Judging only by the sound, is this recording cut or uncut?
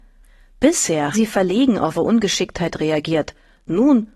cut